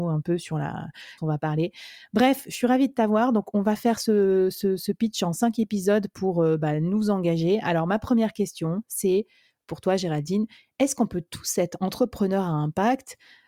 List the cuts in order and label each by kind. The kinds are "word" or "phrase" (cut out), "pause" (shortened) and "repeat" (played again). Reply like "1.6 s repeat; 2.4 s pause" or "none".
1.2 s phrase